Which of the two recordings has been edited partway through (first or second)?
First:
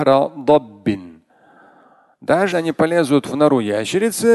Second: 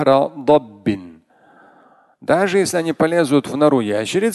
first